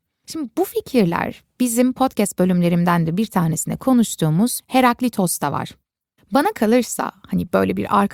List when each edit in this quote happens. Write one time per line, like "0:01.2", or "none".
none